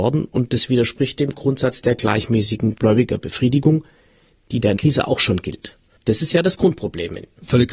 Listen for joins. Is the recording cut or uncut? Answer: cut